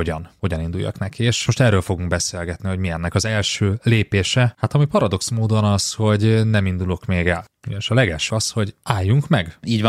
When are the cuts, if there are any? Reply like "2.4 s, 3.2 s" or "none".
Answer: 1.5 s, 8.3 s